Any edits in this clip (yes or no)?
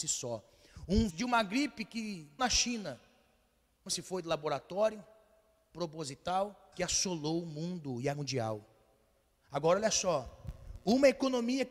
yes